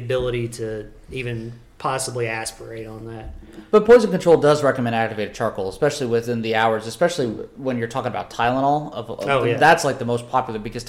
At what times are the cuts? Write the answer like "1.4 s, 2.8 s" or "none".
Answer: 1.7 s

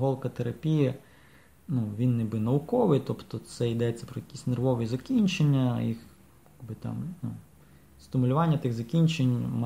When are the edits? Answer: none

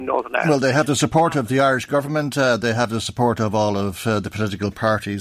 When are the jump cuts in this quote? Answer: none

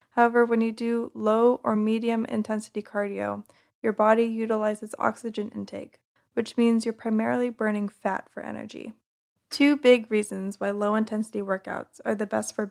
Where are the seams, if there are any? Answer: none

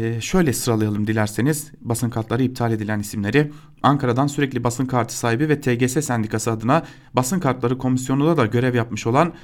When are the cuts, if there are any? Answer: none

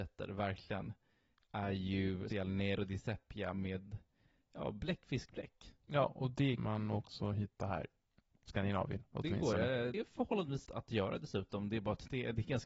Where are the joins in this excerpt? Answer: 2.3 s, 6.6 s, 8.4 s, 9.9 s, 10.6 s

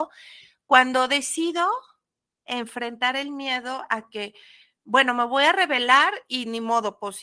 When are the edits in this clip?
none

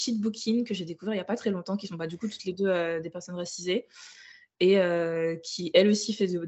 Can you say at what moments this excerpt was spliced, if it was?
none

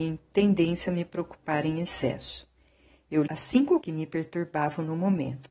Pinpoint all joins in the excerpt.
3.3 s, 3.8 s

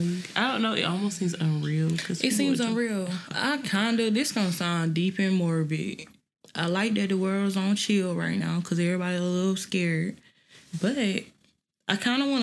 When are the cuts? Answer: none

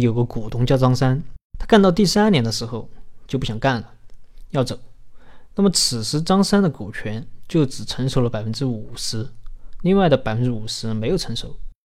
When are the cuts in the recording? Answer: 1.5 s

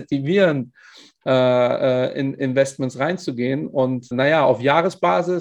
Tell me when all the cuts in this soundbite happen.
4.1 s

